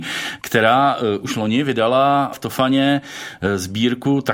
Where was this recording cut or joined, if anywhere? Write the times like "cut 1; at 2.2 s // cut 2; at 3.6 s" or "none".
none